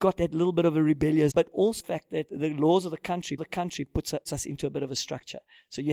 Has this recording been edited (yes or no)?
yes